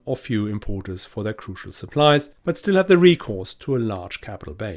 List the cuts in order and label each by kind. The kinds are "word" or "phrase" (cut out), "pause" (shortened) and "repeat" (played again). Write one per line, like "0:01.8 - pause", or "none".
0:02.4 - pause

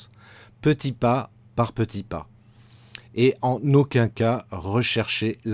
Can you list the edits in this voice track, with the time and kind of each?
none

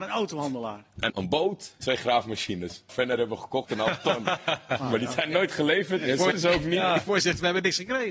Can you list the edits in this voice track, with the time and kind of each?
0:01.1 - word
0:01.8 - word
0:02.9 - word
0:03.7 - word
0:06.3 - word

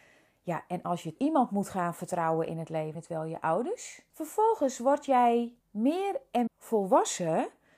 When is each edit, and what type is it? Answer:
0:01.2 - word
0:02.9 - phrase
0:04.1 - pause
0:05.6 - pause
0:06.5 - word

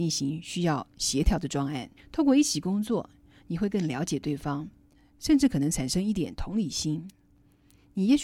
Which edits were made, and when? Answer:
0:02.0 - pause

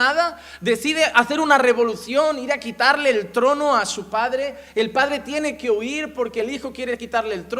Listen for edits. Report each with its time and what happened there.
none

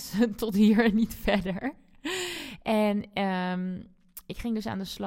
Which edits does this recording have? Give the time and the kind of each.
none

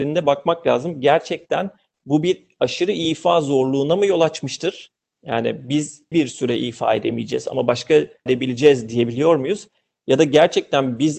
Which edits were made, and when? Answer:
0:06.1 - word
0:08.3 - phrase

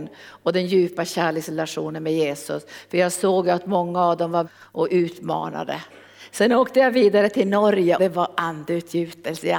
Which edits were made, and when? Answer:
0:04.4 - phrase
0:08.0 - word

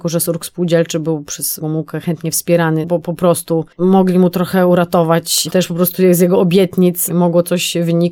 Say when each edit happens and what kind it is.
0:01.6 - word
0:02.8 - word
0:03.7 - pause
0:05.5 - phrase

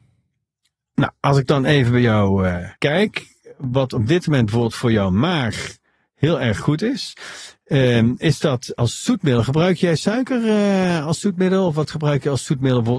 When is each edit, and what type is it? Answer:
0:02.8 - pause

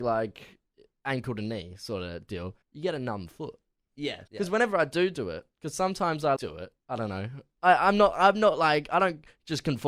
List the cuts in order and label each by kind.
0:02.6 - pause
0:04.3 - pause
0:06.4 - word
0:06.8 - pause

